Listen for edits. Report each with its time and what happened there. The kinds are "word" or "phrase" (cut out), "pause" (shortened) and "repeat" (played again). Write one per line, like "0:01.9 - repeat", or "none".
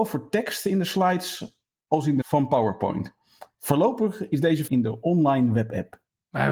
0:02.2 - word
0:04.7 - phrase